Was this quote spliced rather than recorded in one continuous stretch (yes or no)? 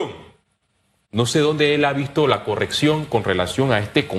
no